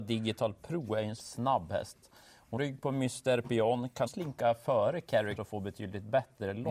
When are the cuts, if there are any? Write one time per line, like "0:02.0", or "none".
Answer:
0:01.2
0:02.6
0:04.1
0:05.4